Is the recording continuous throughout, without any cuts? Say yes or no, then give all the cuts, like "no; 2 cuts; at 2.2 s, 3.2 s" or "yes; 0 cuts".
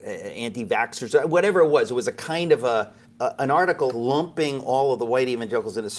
no; 2 cuts; at 3.0 s, 3.9 s